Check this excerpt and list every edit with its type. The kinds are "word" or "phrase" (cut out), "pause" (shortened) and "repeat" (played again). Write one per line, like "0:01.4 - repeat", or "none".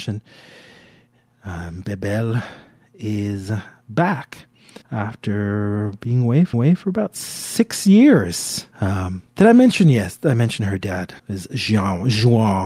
0:04.8 - pause
0:06.5 - repeat
0:08.7 - pause
0:11.2 - pause